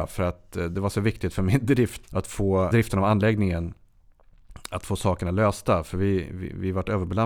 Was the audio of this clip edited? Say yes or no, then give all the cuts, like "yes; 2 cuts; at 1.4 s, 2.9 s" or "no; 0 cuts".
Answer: yes; 2 cuts; at 2.0 s, 2.7 s